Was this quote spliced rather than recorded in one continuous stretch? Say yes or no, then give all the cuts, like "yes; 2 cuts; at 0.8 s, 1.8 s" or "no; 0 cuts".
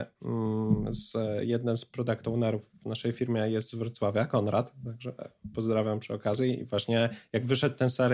no; 0 cuts